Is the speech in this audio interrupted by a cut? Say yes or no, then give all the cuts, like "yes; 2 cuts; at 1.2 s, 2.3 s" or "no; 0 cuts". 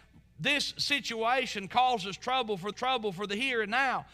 yes; 1 cut; at 2.7 s